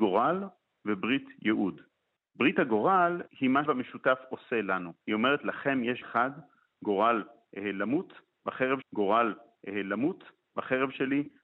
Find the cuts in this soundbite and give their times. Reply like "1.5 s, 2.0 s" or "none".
2.2 s, 3.3 s, 3.7 s, 5.0 s, 6.0 s, 8.8 s